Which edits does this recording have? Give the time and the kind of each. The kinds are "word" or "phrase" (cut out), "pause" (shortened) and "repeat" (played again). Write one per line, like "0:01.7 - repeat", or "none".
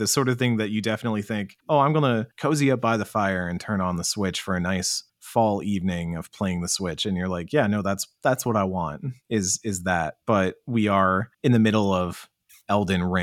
0:01.6 - pause
0:02.3 - pause
0:05.1 - pause
0:10.2 - pause
0:11.3 - pause